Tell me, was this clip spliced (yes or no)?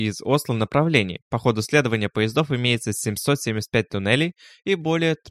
no